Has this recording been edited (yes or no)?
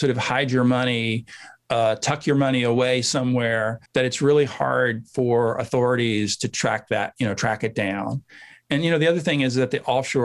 yes